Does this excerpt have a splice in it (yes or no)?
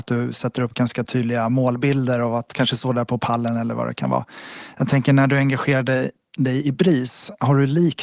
no